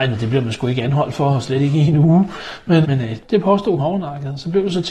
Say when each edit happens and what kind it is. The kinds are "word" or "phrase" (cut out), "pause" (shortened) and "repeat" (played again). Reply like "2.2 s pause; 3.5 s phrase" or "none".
2.8 s word; 3.2 s word; 3.8 s word